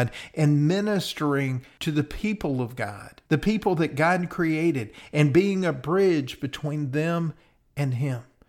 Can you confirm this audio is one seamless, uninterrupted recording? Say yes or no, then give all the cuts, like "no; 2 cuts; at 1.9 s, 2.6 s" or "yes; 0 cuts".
no; 1 cut; at 3.3 s